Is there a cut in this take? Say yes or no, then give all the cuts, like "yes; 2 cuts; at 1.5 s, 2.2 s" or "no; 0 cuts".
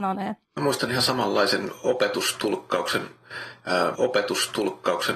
yes; 1 cut; at 3.9 s